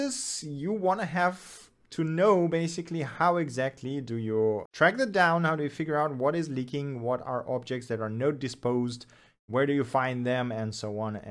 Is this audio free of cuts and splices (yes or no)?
no